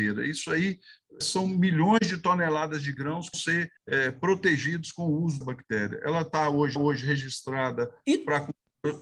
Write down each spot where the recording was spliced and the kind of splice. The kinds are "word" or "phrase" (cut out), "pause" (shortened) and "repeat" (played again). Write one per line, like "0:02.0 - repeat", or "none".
0:01.2 - word
0:03.3 - word
0:03.8 - pause
0:05.4 - word
0:06.8 - repeat